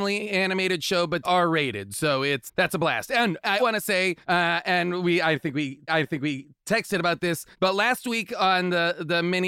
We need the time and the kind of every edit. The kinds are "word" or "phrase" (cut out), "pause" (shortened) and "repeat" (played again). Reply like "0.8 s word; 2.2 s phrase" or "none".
1.2 s word; 2.5 s word; 3.6 s word; 4.2 s pause; 5.9 s repeat; 7.5 s pause